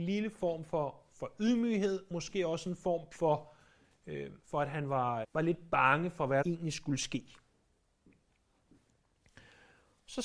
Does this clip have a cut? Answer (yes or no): yes